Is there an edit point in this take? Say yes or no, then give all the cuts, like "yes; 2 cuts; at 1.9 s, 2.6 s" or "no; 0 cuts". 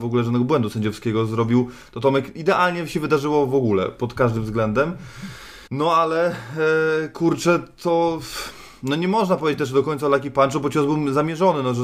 yes; 1 cut; at 5.7 s